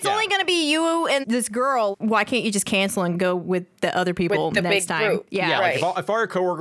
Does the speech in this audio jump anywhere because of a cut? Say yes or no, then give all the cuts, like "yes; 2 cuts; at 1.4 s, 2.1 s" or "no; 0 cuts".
yes; 2 cuts; at 1.2 s, 1.9 s